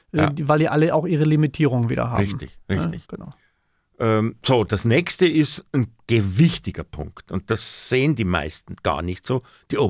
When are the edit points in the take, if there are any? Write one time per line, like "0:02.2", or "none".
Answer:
0:03.0